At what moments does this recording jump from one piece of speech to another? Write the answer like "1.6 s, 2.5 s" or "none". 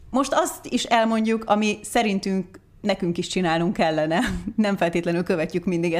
none